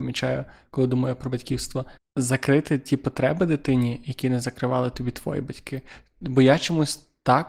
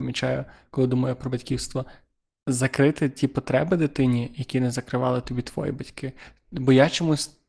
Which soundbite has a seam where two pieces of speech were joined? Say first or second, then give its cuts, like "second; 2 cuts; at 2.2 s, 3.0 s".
first; 1 cut; at 2.0 s